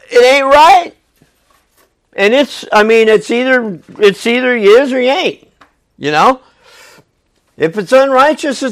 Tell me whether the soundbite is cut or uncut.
uncut